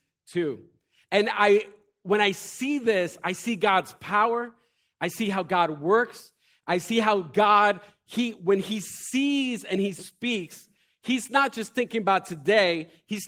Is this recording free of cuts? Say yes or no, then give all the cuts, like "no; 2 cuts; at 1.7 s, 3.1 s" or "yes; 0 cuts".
yes; 0 cuts